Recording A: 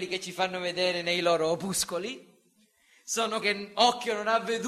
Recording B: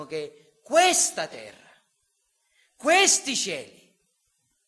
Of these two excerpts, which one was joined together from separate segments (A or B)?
A